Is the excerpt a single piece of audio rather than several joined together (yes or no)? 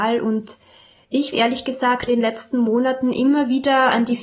no